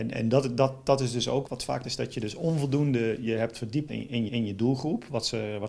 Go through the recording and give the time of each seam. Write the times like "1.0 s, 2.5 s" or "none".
1.5 s, 1.8 s, 3.9 s, 4.3 s